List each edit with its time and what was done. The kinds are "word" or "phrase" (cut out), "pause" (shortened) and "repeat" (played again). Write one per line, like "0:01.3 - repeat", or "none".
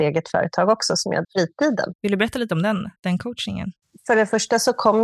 0:01.2 - phrase
0:03.0 - pause